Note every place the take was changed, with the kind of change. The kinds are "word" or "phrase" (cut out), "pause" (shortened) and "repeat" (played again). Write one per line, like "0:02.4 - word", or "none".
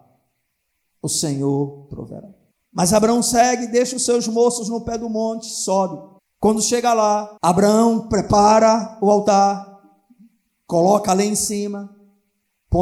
0:02.5 - pause
0:06.2 - pause
0:07.4 - pause